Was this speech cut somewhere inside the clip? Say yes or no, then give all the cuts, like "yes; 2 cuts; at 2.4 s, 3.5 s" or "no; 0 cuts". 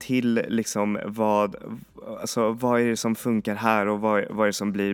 no; 0 cuts